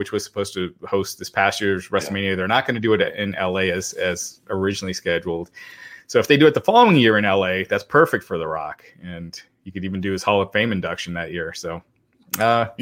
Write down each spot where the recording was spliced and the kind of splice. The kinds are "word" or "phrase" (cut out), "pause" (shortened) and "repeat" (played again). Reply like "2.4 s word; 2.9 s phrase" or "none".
none